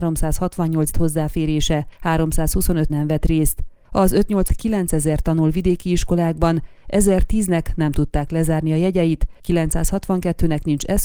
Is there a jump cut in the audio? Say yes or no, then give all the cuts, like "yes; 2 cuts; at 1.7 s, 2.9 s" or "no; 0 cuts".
yes; 3 cuts; at 0.9 s, 2.9 s, 4.5 s